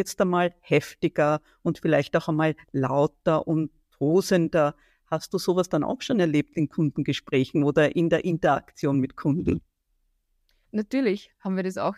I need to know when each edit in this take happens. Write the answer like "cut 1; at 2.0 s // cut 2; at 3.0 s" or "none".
none